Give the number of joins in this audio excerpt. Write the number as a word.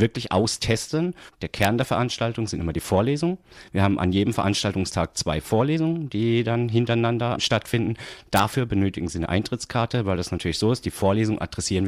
zero